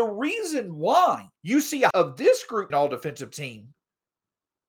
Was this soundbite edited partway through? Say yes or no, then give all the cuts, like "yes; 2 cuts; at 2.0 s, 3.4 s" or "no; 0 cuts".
yes; 3 cuts; at 1.4 s, 1.9 s, 2.7 s